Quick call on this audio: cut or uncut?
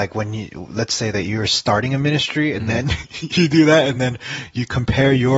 uncut